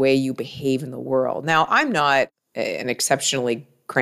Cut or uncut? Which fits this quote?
uncut